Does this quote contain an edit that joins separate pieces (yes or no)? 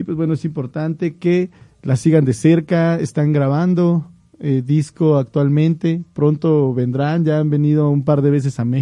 no